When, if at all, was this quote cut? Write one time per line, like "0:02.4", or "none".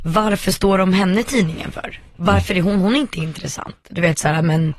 none